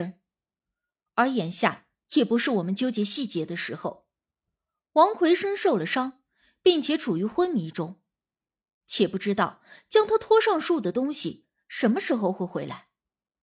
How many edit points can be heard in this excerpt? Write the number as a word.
zero